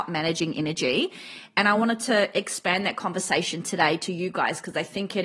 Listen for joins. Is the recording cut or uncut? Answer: uncut